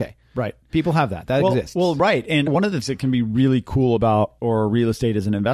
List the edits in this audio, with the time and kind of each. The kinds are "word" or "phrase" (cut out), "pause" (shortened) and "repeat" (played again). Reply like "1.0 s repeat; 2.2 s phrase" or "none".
2.5 s word; 2.8 s word; 4.4 s phrase